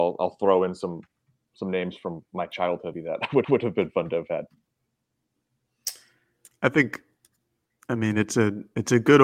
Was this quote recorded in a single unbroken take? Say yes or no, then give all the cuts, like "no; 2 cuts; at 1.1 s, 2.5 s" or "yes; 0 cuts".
no; 2 cuts; at 2.9 s, 3.4 s